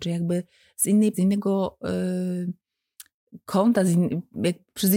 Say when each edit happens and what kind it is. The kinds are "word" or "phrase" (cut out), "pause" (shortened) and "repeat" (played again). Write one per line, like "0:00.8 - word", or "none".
0:01.1 - word